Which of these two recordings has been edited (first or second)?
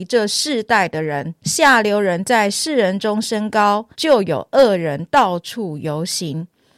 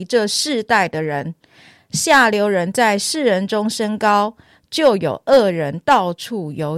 first